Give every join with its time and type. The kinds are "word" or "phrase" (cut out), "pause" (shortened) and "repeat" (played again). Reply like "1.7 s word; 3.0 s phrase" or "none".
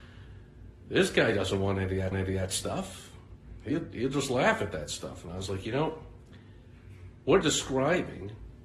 2.1 s repeat; 7.4 s word